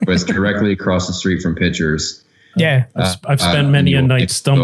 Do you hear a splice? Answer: no; 0 cuts

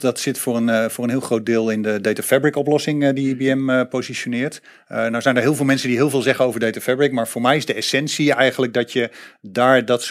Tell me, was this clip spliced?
no; 0 cuts

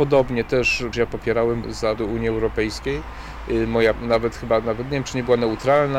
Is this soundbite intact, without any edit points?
no; 4 cuts; at 0.9 s, 1.6 s, 2.0 s, 3.9 s

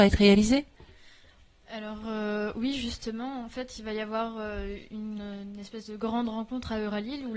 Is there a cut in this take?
no; 0 cuts

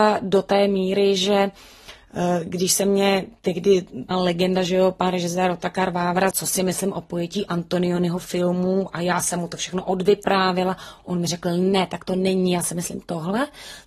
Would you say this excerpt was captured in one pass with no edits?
no; 2 cuts; at 4.1 s, 6.3 s

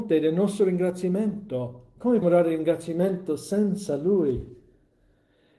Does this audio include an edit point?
yes; 1 cut; at 2.2 s

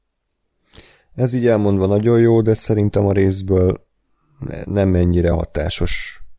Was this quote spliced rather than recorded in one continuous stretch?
no; 0 cuts

